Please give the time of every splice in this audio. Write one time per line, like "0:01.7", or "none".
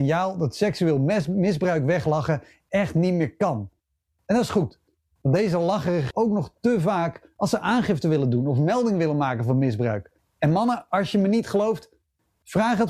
0:06.1
0:10.2